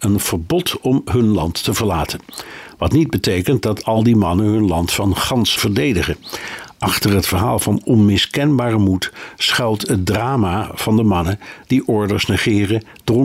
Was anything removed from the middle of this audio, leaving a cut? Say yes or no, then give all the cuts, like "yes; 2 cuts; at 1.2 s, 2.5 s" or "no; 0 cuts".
yes; 1 cut; at 5.6 s